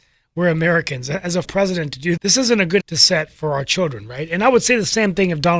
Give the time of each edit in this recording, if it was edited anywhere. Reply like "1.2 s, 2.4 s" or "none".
1.4 s, 2.2 s, 2.8 s